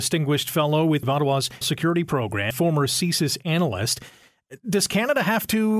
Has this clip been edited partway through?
yes; 3 cuts; at 1.0 s, 1.6 s, 2.5 s

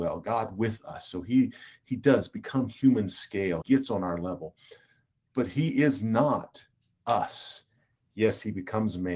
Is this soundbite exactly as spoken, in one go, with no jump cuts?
no; 1 cut; at 3.6 s

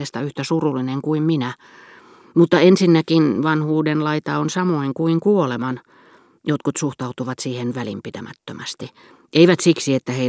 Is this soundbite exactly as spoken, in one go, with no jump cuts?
yes; 0 cuts

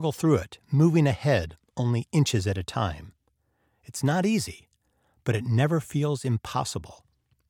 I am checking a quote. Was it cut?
no; 0 cuts

